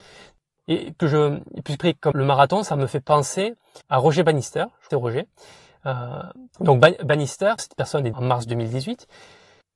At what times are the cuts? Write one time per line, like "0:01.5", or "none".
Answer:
0:01.0
0:01.8
0:02.1
0:03.8
0:04.9
0:06.5
0:07.6
0:08.1